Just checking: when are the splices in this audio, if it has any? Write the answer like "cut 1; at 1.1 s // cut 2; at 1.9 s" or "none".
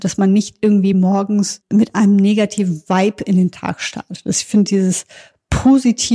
none